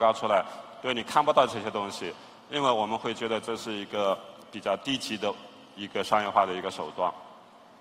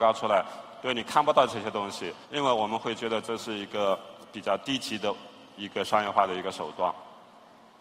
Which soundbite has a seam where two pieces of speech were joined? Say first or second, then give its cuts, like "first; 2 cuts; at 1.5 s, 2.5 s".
second; 1 cut; at 2.2 s